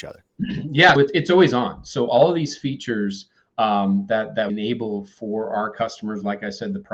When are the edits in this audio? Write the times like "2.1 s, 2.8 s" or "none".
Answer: 1.0 s, 4.5 s